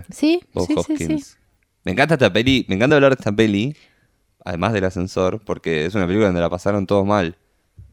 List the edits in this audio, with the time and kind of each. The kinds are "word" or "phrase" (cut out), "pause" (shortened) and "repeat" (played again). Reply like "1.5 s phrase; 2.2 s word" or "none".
none

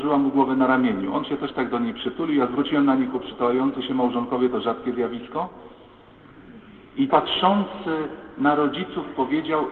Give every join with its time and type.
3.1 s word; 7.1 s word

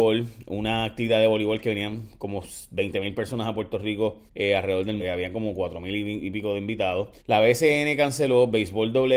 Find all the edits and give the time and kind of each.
4.3 s pause; 5.0 s word; 7.2 s pause

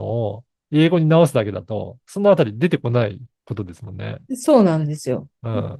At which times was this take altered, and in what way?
none

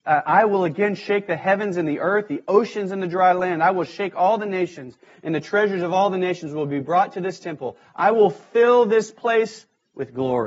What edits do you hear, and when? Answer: none

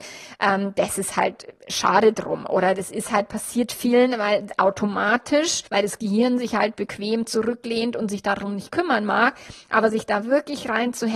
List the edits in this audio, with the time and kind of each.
5.7 s pause

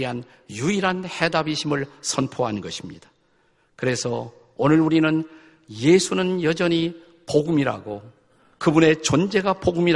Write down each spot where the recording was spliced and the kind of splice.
none

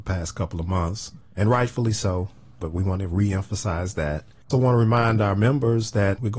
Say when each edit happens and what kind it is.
4.5 s word

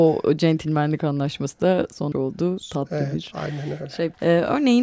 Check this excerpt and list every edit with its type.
2.1 s word

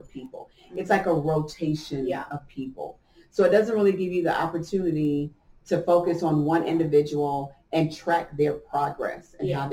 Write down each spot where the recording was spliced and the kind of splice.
none

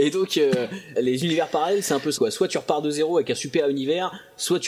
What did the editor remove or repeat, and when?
1.0 s word; 2.2 s word

